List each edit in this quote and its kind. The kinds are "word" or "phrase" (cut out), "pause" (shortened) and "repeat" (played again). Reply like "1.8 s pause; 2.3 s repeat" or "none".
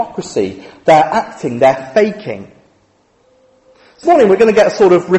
4.0 s word